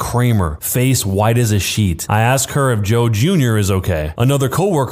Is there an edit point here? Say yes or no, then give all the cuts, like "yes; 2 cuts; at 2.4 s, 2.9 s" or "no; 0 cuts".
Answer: no; 0 cuts